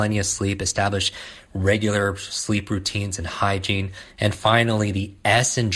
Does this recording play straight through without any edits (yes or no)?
yes